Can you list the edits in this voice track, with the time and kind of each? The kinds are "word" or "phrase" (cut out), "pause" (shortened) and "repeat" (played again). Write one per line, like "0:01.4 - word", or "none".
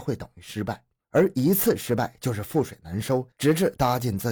0:01.0 - pause
0:03.3 - pause